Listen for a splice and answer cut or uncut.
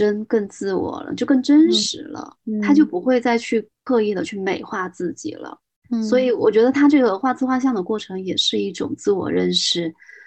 uncut